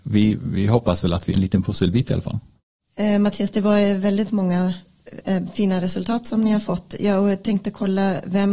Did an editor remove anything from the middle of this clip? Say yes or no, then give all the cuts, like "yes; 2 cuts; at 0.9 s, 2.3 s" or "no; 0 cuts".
yes; 1 cut; at 1.3 s